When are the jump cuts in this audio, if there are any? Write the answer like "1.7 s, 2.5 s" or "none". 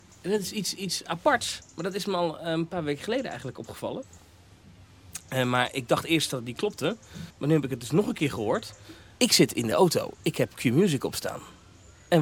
7.3 s